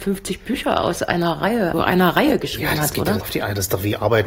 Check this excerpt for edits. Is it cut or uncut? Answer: cut